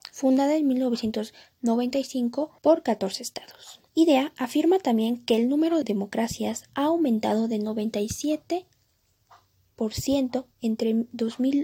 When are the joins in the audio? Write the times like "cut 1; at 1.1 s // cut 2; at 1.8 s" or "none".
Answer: cut 1; at 2.6 s // cut 2; at 3.9 s // cut 3; at 5.8 s // cut 4; at 6.7 s